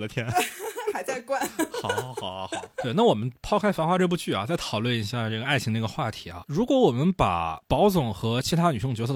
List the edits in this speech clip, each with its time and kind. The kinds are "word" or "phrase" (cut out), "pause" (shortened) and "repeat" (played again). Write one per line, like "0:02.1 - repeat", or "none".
none